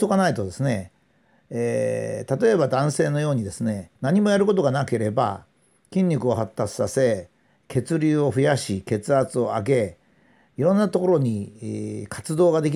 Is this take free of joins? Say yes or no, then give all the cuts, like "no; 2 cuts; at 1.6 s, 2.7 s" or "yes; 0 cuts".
no; 1 cut; at 4.0 s